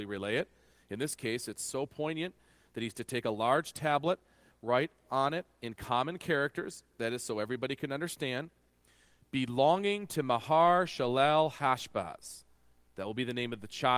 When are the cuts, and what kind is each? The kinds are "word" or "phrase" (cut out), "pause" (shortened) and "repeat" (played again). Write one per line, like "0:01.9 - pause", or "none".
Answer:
none